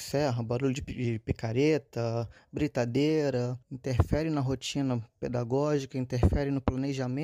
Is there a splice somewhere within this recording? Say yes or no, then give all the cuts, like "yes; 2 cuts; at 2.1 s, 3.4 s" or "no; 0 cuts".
yes; 1 cut; at 3.6 s